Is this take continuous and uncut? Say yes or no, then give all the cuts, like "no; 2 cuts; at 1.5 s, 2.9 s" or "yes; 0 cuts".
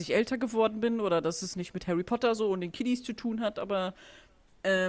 yes; 0 cuts